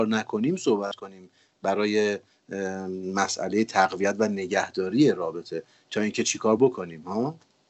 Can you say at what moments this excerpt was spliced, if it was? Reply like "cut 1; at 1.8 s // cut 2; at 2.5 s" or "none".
none

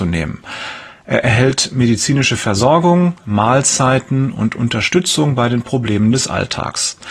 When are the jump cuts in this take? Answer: none

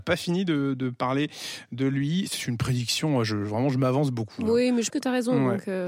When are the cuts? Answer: cut 1; at 4.9 s

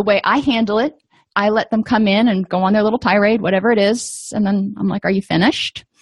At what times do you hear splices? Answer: none

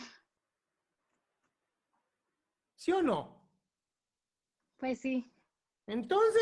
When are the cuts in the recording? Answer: none

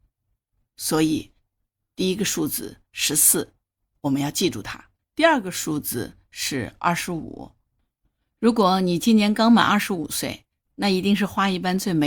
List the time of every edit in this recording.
cut 1; at 5.0 s

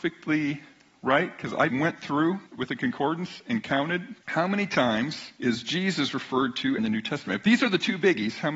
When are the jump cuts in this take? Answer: cut 1; at 1.7 s // cut 2; at 2.5 s // cut 3; at 4.2 s // cut 4; at 5.4 s // cut 5; at 6.8 s

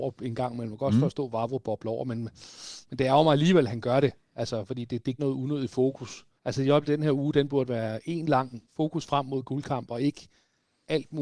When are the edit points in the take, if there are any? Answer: cut 1; at 5.2 s // cut 2; at 6.4 s // cut 3; at 8.7 s

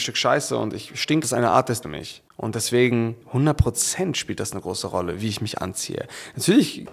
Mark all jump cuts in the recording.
cut 1; at 1.2 s // cut 2; at 1.8 s // cut 3; at 3.2 s

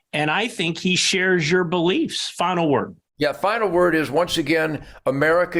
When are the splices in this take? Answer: cut 1; at 3.1 s

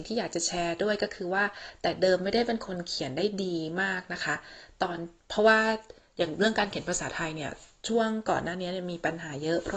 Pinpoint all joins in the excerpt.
none

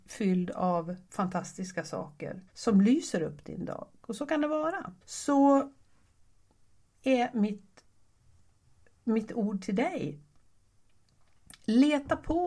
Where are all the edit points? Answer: cut 1; at 1.1 s // cut 2; at 2.5 s // cut 3; at 5.0 s

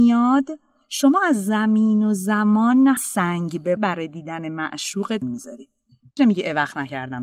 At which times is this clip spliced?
cut 1; at 3.0 s // cut 2; at 3.8 s // cut 3; at 5.2 s // cut 4; at 6.2 s

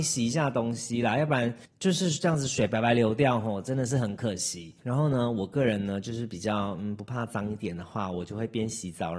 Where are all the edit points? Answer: cut 1; at 1.6 s // cut 2; at 4.8 s

